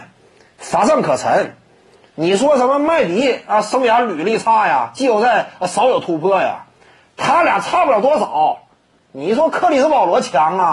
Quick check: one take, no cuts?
yes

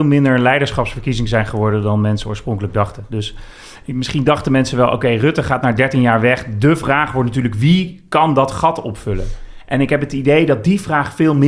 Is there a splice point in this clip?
no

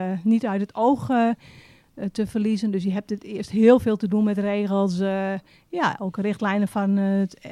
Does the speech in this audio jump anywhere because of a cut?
no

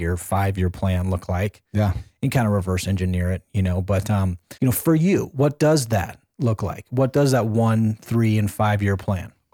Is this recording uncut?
no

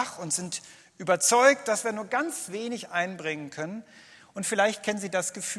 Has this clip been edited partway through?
no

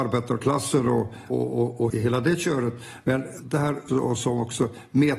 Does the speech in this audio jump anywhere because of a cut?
yes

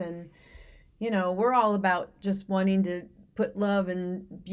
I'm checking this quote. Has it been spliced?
no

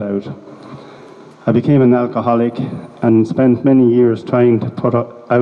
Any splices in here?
no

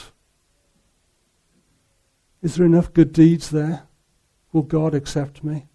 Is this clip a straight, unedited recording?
yes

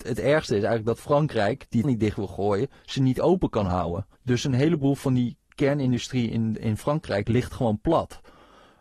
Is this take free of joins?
no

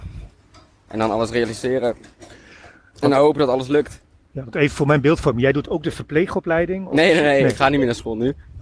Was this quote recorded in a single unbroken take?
yes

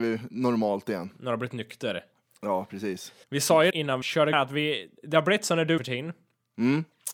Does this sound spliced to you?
yes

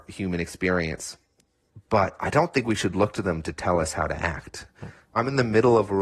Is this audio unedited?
yes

